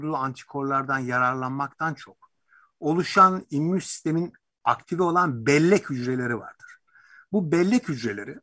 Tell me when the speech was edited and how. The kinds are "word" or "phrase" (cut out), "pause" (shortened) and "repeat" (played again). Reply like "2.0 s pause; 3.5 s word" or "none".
none

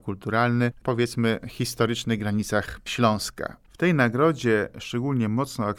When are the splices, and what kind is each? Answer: none

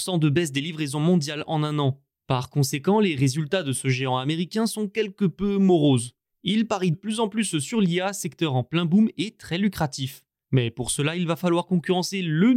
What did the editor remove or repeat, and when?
6.9 s phrase

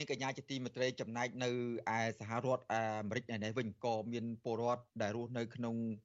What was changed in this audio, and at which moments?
4.9 s pause

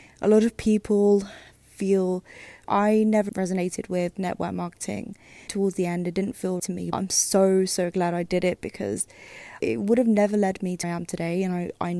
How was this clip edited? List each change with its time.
2.6 s word; 3.3 s word; 5.5 s word; 6.6 s word; 6.9 s word; 9.6 s word; 10.8 s word

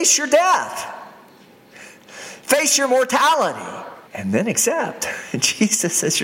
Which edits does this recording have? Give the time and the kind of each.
4.1 s pause

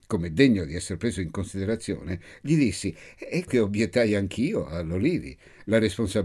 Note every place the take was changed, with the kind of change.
3.5 s word

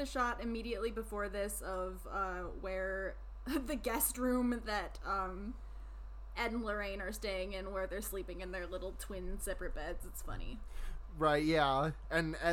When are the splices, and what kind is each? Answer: none

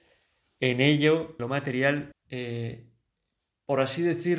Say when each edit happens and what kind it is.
1.4 s word; 2.1 s phrase

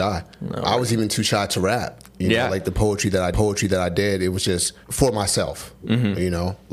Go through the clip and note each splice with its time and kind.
3.3 s repeat; 4.8 s pause

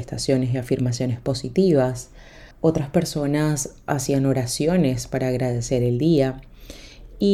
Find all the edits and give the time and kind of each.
2.5 s pause

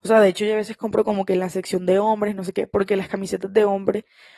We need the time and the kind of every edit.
none

